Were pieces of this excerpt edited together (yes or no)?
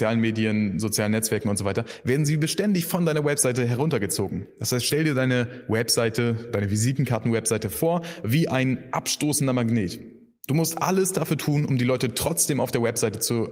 no